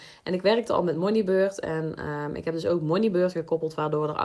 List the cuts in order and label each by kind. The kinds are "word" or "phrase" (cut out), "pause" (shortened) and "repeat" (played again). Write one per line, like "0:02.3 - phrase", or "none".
none